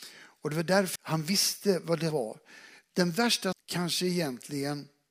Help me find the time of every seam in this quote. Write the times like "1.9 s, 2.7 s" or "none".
1.0 s, 2.1 s, 3.5 s